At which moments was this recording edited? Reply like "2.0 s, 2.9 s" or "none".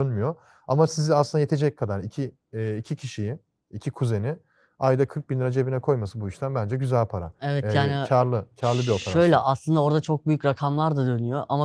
none